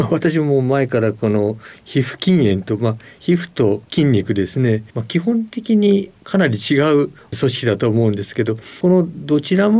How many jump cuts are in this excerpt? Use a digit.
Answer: 1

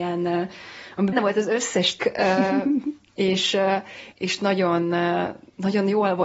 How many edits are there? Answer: 3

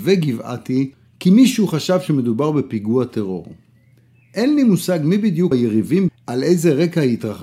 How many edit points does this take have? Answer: 2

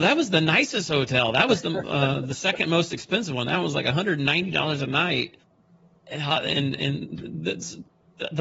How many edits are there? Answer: 0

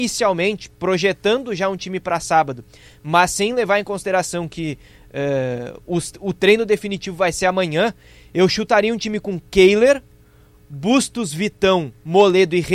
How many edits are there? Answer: 0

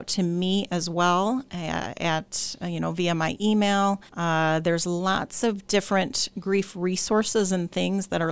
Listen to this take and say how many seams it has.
1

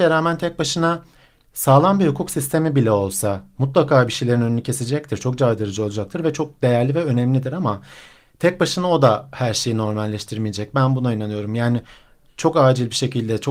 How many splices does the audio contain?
0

